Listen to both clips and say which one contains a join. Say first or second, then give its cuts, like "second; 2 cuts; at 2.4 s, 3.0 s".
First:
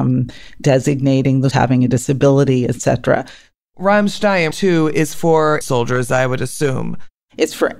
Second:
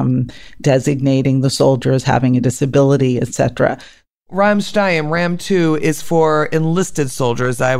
first; 3 cuts; at 1.5 s, 4.5 s, 5.6 s